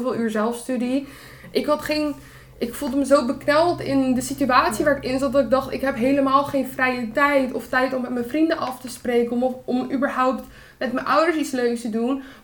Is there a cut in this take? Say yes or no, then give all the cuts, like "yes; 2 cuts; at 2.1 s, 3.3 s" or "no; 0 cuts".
no; 0 cuts